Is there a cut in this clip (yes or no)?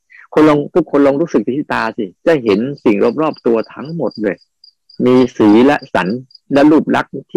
yes